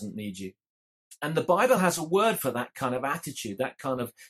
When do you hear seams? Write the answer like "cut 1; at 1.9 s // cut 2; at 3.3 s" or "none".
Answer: none